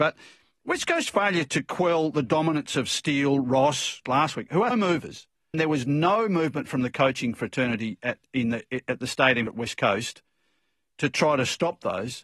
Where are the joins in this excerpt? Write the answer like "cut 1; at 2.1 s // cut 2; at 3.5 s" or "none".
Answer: cut 1; at 4.1 s // cut 2; at 4.7 s // cut 3; at 5.5 s // cut 4; at 9.5 s

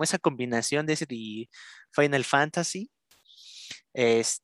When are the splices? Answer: cut 1; at 1.1 s

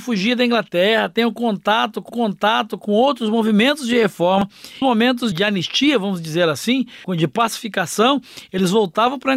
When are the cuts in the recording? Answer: cut 1; at 2.1 s // cut 2; at 4.8 s // cut 3; at 5.3 s // cut 4; at 7.0 s

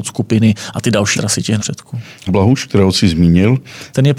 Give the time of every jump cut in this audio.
cut 1; at 1.1 s // cut 2; at 1.6 s // cut 3; at 2.3 s

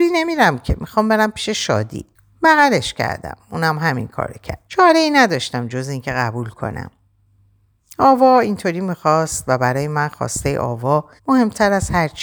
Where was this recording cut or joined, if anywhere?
cut 1; at 2.1 s // cut 2; at 4.7 s // cut 3; at 11.2 s

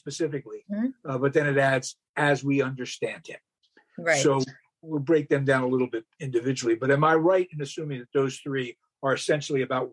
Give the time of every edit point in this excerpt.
none

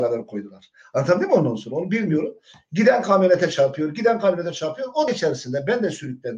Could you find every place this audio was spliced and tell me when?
cut 1; at 5.1 s

